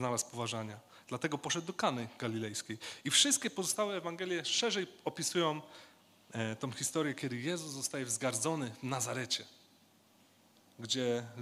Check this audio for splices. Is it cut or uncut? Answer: uncut